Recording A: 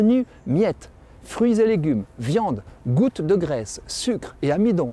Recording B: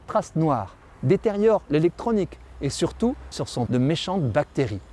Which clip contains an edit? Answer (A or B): B